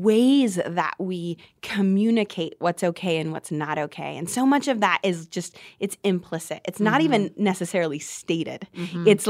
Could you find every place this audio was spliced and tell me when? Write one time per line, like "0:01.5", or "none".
none